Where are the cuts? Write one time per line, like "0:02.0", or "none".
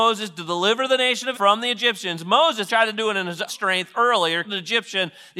0:01.3
0:02.7
0:03.5
0:04.4